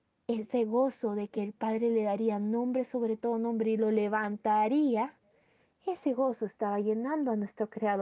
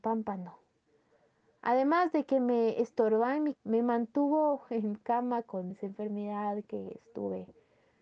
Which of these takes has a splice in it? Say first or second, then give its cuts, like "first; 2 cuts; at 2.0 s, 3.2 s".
second; 2 cuts; at 3.5 s, 5.7 s